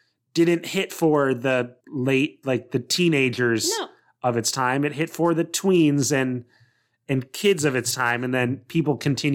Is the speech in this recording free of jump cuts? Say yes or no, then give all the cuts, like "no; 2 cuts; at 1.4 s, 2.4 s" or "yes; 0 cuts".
no; 1 cut; at 1.8 s